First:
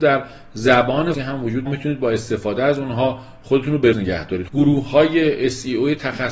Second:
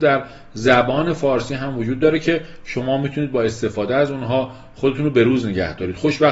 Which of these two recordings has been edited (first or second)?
first